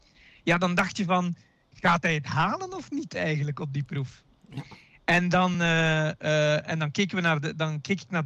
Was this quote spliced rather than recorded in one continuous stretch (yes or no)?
no